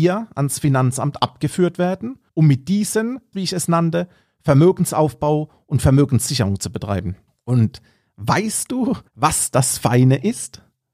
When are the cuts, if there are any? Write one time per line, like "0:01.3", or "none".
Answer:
0:02.3
0:03.3
0:07.3
0:09.1